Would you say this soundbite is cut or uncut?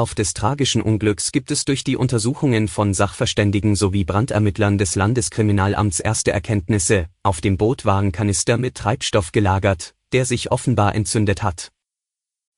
uncut